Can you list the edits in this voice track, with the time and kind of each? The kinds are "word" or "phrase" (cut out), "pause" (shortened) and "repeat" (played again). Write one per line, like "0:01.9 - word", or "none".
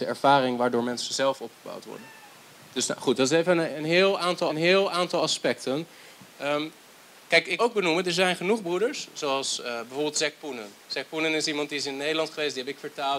0:04.5 - repeat
0:07.6 - word